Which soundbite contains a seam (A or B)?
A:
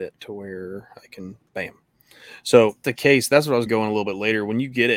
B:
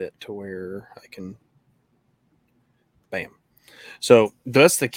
A